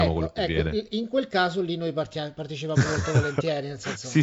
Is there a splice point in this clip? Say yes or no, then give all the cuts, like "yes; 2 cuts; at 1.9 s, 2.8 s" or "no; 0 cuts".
no; 0 cuts